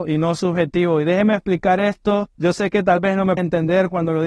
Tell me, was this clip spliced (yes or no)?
yes